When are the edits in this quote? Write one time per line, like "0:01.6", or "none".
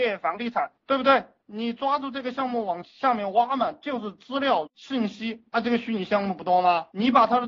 0:04.7
0:05.5